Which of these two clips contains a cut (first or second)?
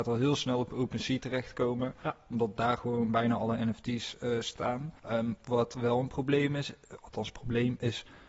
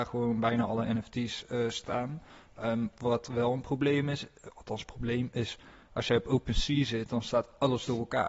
first